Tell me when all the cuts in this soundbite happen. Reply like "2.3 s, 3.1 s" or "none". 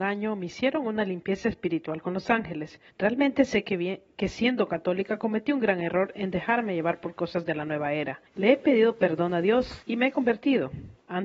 2.9 s, 8.3 s, 9.8 s